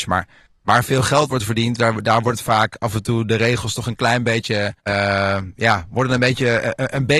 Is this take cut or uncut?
cut